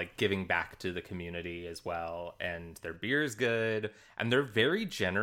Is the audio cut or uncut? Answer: uncut